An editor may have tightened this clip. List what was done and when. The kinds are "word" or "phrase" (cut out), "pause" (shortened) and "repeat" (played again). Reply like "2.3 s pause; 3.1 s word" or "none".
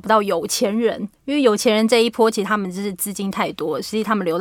1.1 s pause